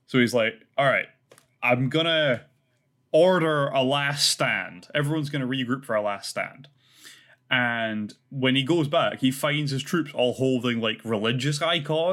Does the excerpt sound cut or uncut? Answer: uncut